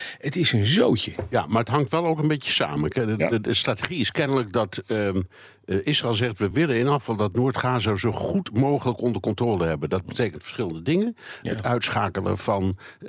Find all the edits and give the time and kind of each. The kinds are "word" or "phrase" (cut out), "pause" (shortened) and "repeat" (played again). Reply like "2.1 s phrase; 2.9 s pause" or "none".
none